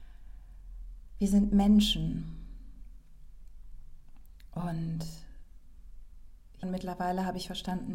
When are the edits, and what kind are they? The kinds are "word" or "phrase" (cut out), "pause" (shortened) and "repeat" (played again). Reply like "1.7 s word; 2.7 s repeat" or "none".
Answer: 6.6 s word